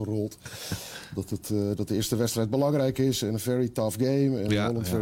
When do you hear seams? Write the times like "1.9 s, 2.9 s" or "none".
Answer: none